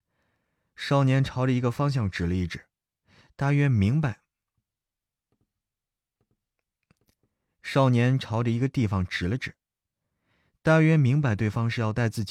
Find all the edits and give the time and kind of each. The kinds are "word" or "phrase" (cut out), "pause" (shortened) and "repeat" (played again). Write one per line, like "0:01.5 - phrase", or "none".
none